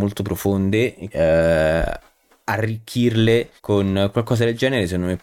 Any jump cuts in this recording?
yes; 2 cuts; at 1.1 s, 3.6 s

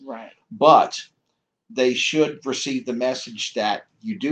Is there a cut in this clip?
no; 0 cuts

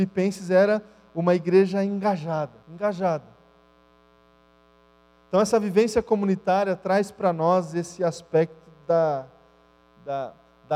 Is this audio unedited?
no; 1 cut; at 2.6 s

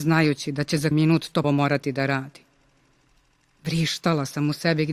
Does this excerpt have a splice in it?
yes; 2 cuts; at 0.9 s, 1.4 s

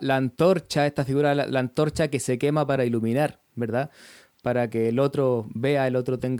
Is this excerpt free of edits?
yes; 0 cuts

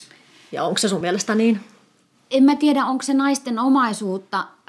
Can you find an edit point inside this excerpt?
no; 0 cuts

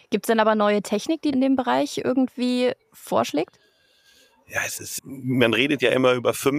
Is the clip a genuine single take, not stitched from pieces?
no; 2 cuts; at 1.3 s, 5.0 s

